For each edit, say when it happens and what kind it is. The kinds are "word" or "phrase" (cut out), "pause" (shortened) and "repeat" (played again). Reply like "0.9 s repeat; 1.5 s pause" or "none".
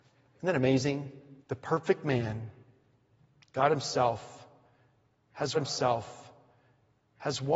1.4 s pause; 5.5 s repeat